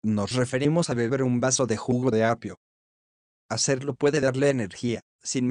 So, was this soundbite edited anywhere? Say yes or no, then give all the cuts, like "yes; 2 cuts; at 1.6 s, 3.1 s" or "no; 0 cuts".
no; 0 cuts